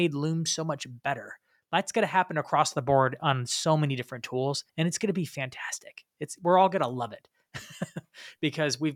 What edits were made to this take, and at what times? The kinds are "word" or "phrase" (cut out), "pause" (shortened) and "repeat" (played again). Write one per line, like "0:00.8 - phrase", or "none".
0:04.7 - pause